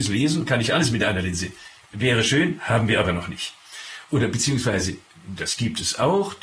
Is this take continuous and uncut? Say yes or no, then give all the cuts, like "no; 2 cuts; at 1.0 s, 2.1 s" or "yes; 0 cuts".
yes; 0 cuts